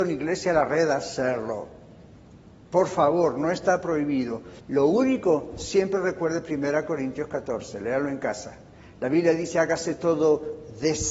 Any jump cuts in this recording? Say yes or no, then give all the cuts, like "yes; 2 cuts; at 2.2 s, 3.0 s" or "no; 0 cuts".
yes; 1 cut; at 4.6 s